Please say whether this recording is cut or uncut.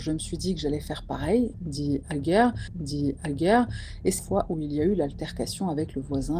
cut